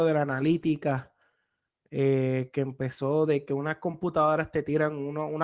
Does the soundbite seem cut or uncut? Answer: uncut